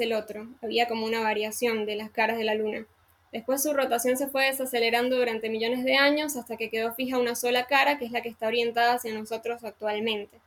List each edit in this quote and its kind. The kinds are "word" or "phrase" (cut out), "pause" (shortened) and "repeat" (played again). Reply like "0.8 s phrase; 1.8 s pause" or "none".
none